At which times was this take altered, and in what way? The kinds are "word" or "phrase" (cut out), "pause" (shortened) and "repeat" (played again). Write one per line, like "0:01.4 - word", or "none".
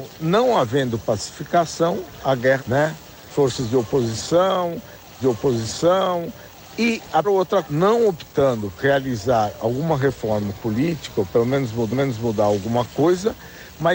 0:02.6 - word
0:05.2 - repeat
0:07.2 - word
0:07.7 - phrase
0:08.8 - word
0:11.9 - repeat